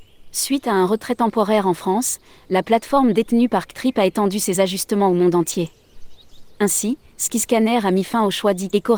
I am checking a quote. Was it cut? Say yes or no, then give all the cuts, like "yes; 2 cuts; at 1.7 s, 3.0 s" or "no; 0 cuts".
no; 0 cuts